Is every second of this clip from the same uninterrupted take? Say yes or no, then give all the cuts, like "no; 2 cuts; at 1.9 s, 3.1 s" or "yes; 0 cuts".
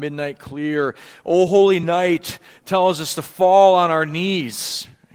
yes; 0 cuts